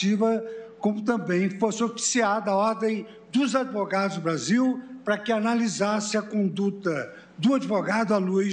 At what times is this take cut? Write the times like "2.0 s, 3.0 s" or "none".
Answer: none